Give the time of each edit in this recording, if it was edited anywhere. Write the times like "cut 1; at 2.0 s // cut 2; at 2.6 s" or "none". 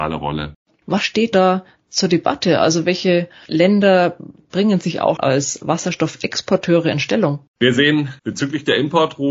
cut 1; at 1.3 s // cut 2; at 5.2 s // cut 3; at 7.5 s // cut 4; at 8.2 s